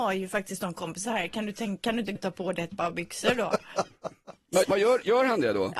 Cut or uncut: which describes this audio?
cut